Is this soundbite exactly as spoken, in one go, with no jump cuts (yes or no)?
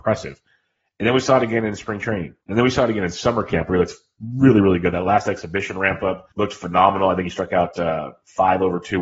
no